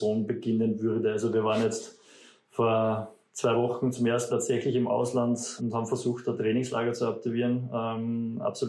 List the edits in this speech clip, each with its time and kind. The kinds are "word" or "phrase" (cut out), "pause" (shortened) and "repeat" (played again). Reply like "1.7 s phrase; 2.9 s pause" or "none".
4.3 s word; 5.6 s word; 6.4 s word